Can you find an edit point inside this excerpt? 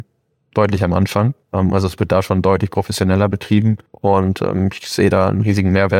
yes; 2 cuts; at 1.4 s, 3.9 s

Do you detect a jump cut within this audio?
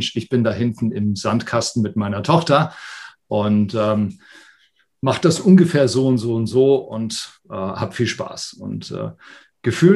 no; 0 cuts

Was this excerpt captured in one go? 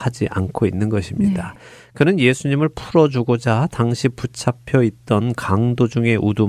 yes; 0 cuts

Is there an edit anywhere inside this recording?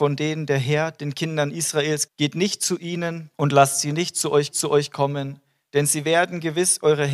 yes; 3 cuts; at 2.1 s, 3.3 s, 4.5 s

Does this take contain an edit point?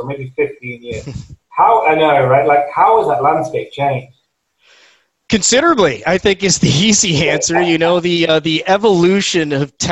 no; 0 cuts

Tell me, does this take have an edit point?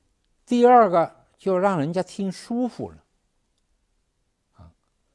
no; 0 cuts

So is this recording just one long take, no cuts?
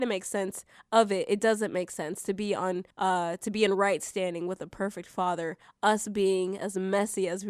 no; 1 cut; at 2.9 s

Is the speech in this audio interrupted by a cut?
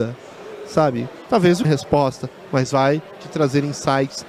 yes; 1 cut; at 1.6 s

